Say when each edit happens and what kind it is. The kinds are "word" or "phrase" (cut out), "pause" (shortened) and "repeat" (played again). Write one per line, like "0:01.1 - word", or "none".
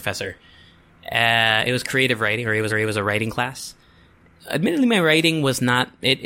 0:02.7 - repeat